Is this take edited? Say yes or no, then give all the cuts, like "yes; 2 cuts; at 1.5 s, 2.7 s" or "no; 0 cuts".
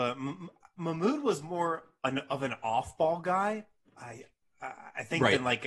no; 0 cuts